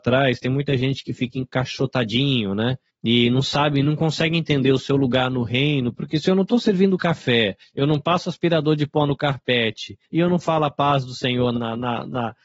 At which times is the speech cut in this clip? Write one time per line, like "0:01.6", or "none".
0:11.5